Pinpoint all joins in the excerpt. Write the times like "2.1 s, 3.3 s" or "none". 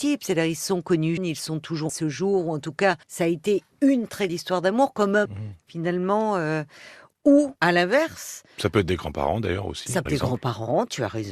1.2 s, 1.9 s, 3.0 s, 4.3 s, 5.3 s, 7.6 s, 10.1 s